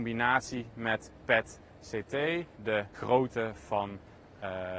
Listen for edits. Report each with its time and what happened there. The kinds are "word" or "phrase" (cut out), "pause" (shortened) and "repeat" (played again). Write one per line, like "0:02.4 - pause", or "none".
0:02.6 - word
0:02.9 - word